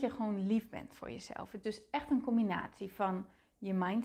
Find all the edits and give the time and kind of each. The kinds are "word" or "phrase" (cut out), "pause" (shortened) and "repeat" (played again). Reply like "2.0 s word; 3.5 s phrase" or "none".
1.6 s word